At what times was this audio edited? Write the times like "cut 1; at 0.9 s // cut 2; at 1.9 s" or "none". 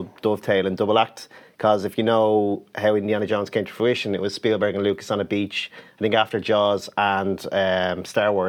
none